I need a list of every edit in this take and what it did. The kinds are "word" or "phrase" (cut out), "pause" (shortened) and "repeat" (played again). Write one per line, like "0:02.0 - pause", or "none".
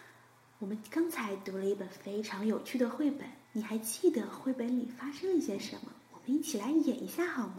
0:03.4 - pause